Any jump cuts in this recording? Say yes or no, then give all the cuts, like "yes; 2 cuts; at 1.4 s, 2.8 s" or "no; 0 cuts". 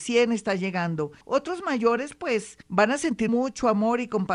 yes; 3 cuts; at 1.2 s, 2.6 s, 3.3 s